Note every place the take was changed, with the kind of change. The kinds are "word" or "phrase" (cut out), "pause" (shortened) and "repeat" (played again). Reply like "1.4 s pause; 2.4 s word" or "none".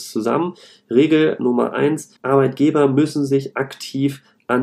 2.2 s pause